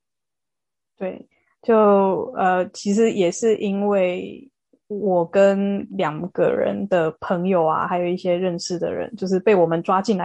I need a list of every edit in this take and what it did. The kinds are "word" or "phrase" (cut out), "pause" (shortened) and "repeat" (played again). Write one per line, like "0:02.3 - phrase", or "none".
0:05.9 - word